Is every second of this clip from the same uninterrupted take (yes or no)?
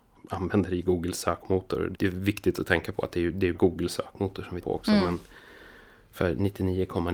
no